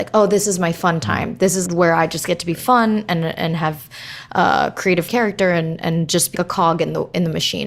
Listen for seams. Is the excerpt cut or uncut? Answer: cut